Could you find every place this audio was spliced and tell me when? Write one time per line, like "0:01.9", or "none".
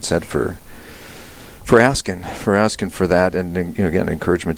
none